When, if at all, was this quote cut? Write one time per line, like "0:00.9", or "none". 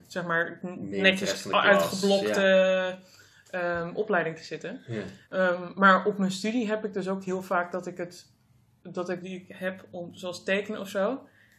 0:05.2
0:09.2